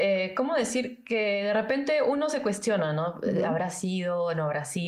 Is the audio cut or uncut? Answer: uncut